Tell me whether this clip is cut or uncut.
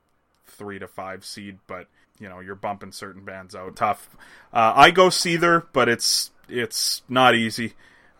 cut